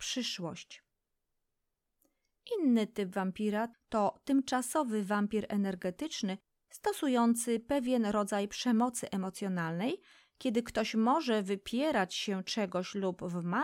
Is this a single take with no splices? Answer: yes; 0 cuts

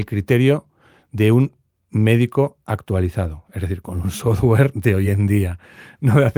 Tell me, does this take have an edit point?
no; 0 cuts

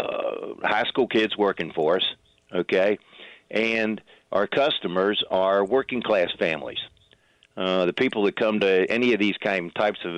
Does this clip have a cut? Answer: no; 0 cuts

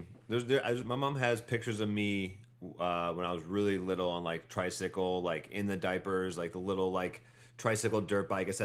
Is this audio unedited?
no; 1 cut; at 2.5 s

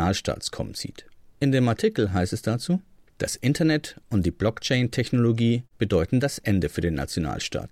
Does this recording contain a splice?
no; 0 cuts

